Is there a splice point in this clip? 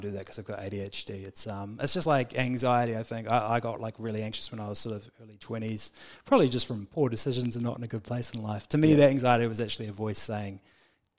no; 0 cuts

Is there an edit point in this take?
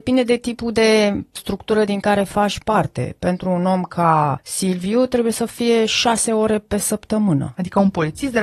no; 0 cuts

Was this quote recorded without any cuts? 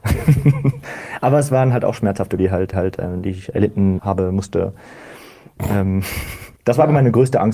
no; 4 cuts; at 2.4 s, 2.7 s, 4.0 s, 6.6 s

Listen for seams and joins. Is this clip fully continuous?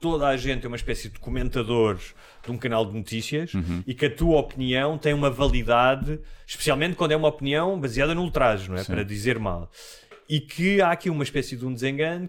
yes; 0 cuts

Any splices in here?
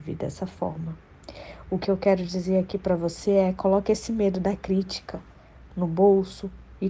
no; 0 cuts

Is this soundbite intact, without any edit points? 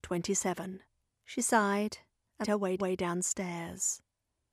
no; 3 cuts; at 1.1 s, 2.4 s, 2.8 s

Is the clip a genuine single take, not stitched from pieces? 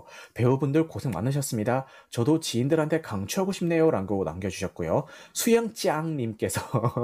yes; 0 cuts

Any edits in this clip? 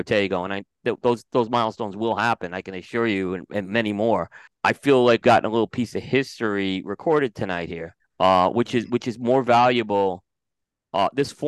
yes; 3 cuts; at 4.5 s, 5.2 s, 8.0 s

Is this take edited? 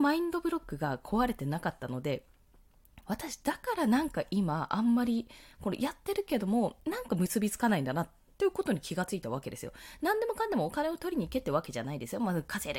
yes; 1 cut; at 3.0 s

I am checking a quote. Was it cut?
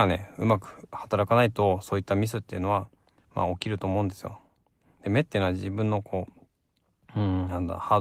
no; 0 cuts

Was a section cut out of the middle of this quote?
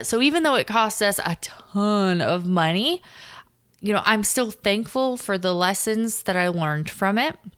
no; 0 cuts

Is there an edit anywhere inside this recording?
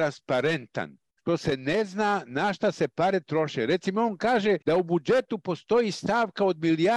yes; 1 cut; at 4.6 s

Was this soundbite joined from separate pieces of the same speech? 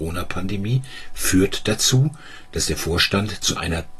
no; 0 cuts

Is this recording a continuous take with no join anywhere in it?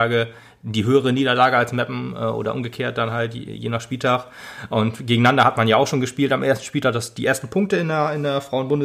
yes; 0 cuts

